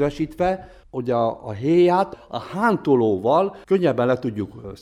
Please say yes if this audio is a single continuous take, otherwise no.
no